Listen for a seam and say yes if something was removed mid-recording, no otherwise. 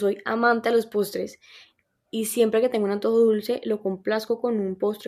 no